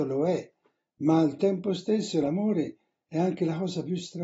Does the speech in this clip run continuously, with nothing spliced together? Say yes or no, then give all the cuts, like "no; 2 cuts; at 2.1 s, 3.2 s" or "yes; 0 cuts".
yes; 0 cuts